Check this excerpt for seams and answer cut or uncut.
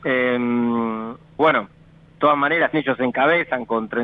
cut